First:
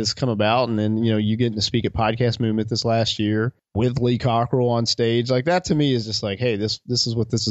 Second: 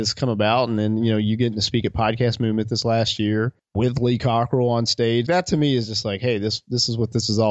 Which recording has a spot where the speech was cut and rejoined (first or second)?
second